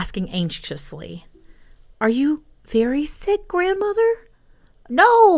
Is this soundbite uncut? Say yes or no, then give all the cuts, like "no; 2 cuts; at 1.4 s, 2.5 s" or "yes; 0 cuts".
yes; 0 cuts